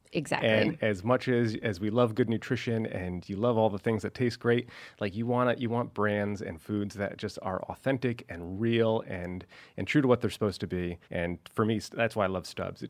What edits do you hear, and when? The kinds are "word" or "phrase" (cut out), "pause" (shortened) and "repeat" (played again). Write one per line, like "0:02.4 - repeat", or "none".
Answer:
0:11.0 - pause